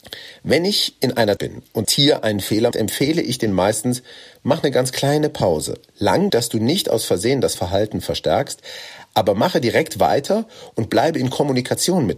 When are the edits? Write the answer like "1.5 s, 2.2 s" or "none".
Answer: 1.4 s, 1.8 s, 2.7 s, 3.5 s, 6.3 s, 7.5 s